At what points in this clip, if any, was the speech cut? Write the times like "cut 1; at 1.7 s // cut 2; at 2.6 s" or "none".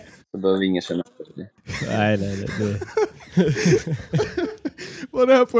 none

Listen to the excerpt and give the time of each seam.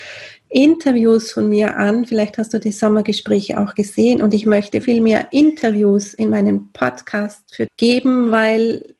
cut 1; at 4.8 s // cut 2; at 7.7 s

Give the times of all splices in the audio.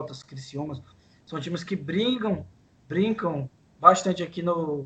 none

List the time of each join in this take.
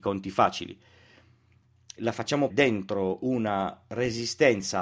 cut 1; at 2.0 s // cut 2; at 2.5 s

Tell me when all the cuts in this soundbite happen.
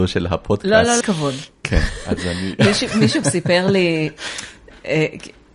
cut 1; at 1.0 s // cut 2; at 3.2 s

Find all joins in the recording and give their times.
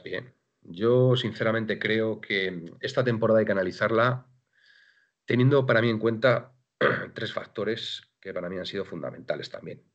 none

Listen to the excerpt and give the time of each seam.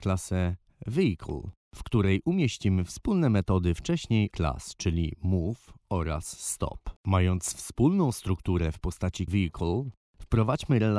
cut 1; at 4.3 s // cut 2; at 7.0 s // cut 3; at 9.3 s

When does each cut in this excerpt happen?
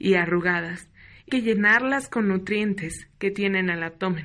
cut 1; at 1.3 s

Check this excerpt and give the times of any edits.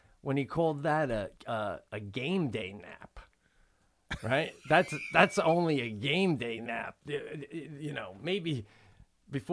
cut 1; at 1.4 s

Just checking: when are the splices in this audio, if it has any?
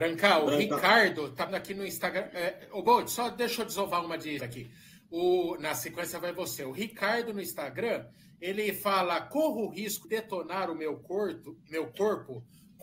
cut 1; at 1.5 s // cut 2; at 4.4 s // cut 3; at 10.0 s

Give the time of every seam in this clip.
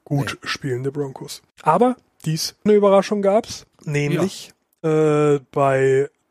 cut 1; at 1.5 s // cut 2; at 2.7 s // cut 3; at 3.7 s

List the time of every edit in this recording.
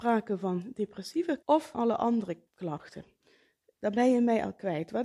cut 1; at 1.4 s // cut 2; at 1.7 s // cut 3; at 2.5 s

